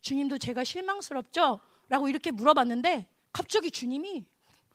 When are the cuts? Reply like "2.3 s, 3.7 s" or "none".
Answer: 3.3 s